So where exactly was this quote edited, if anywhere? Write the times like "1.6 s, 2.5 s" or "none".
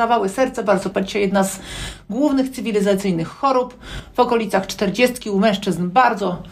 0.9 s